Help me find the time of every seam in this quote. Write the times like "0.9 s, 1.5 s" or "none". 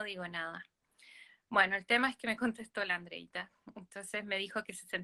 none